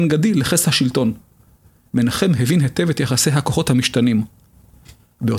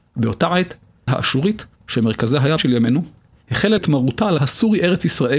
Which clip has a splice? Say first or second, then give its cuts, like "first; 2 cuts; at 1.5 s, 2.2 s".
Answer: second; 5 cuts; at 1.1 s, 1.8 s, 2.6 s, 3.8 s, 4.4 s